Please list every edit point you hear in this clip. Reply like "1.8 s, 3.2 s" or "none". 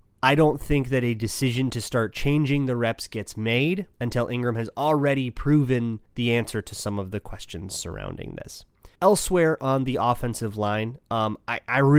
3.9 s, 6.1 s, 8.9 s